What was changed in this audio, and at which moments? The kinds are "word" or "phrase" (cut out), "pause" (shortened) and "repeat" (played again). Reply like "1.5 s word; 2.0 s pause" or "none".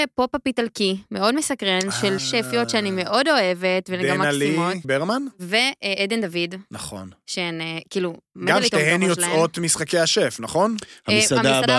2.2 s word; 4.8 s word